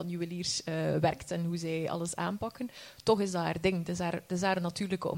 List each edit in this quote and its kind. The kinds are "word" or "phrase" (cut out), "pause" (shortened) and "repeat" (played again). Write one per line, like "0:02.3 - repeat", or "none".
none